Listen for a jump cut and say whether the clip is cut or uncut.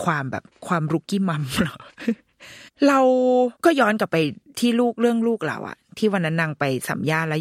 cut